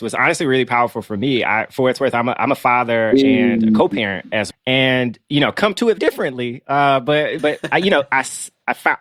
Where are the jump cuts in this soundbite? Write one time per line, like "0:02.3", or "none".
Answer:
0:04.5
0:06.0
0:07.4